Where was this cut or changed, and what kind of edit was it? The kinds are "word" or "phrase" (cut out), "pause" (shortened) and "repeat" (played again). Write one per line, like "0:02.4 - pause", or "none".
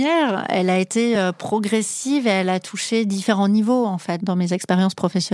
none

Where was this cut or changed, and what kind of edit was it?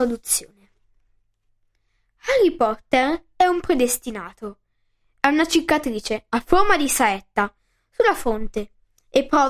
none

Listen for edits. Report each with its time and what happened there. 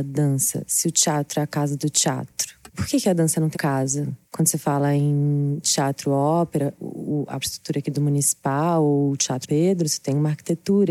0:03.5 - word
0:04.2 - pause
0:07.4 - word
0:09.4 - word

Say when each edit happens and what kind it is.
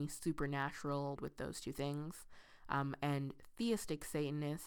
0:01.2 - phrase

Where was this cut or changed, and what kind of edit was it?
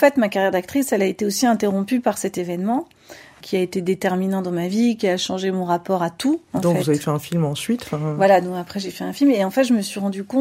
none

